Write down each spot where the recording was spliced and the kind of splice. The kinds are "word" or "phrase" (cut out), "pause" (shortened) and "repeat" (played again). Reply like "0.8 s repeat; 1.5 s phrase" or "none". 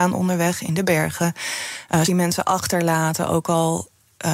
2.1 s word